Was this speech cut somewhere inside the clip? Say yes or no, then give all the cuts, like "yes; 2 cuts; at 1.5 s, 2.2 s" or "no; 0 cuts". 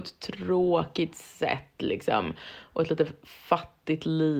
no; 0 cuts